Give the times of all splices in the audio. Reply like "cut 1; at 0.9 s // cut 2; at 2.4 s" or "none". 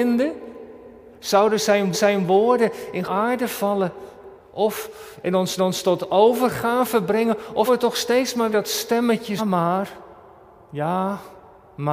cut 1; at 1.9 s // cut 2; at 3.0 s // cut 3; at 4.4 s // cut 4; at 5.6 s // cut 5; at 7.7 s // cut 6; at 8.5 s // cut 7; at 9.4 s